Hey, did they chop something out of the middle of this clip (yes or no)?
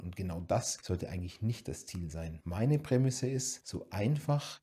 no